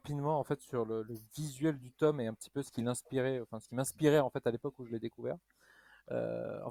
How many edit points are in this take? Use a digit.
0